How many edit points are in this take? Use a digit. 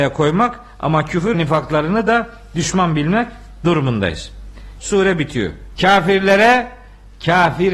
3